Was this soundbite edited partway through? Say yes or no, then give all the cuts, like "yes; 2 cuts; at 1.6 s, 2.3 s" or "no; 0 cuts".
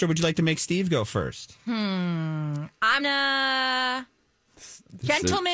yes; 1 cut; at 3.0 s